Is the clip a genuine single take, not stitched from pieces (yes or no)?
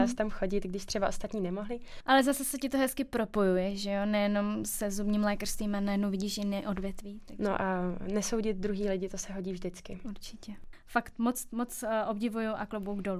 yes